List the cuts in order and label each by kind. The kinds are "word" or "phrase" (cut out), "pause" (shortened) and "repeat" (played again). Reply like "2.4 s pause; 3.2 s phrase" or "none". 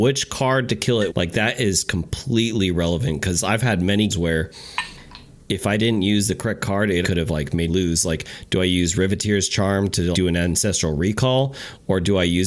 1.1 s word; 4.1 s word; 7.0 s word; 7.7 s word; 10.1 s word